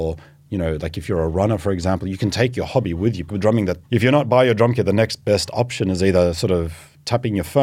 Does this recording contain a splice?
yes; 2 cuts; at 3.3 s, 3.9 s

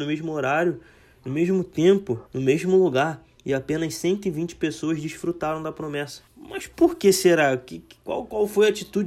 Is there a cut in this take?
yes; 2 cuts; at 2.3 s, 6.3 s

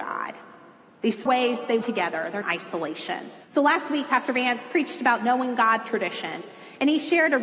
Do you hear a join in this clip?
yes; 5 cuts; at 1.3 s, 1.8 s, 2.4 s, 3.4 s, 5.8 s

